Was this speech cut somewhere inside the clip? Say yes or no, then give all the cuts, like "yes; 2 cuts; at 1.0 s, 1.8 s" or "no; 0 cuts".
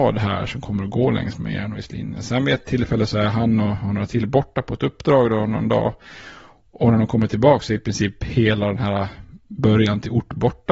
no; 0 cuts